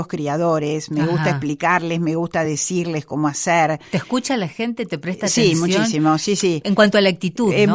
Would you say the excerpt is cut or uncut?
uncut